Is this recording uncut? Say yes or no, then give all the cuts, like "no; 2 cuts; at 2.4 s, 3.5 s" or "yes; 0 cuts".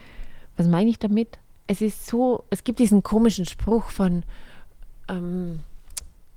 yes; 0 cuts